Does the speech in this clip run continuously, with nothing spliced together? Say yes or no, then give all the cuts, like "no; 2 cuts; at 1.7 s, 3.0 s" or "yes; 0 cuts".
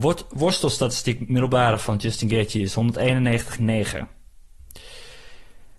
yes; 0 cuts